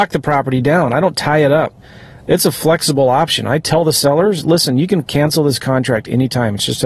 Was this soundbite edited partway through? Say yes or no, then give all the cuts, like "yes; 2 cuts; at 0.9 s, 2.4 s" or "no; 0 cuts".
no; 0 cuts